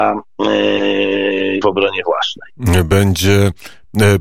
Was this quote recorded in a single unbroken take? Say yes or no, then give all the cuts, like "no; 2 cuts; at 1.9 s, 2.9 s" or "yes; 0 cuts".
no; 1 cut; at 1.6 s